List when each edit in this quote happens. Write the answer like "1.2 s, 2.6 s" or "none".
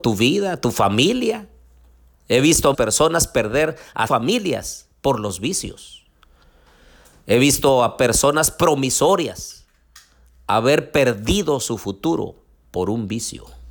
2.7 s, 4.1 s